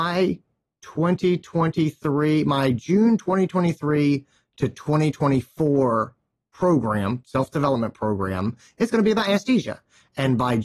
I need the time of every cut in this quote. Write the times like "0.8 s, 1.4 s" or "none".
none